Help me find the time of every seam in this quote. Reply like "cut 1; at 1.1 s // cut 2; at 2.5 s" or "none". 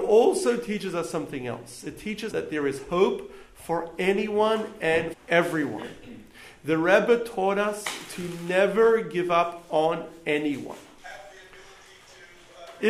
cut 1; at 2.3 s // cut 2; at 5.1 s

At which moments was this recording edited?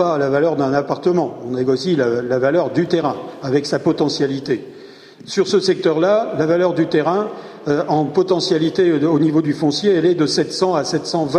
none

